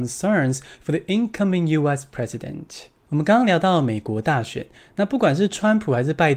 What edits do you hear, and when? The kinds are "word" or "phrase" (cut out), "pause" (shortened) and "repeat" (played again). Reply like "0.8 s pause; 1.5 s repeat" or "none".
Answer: none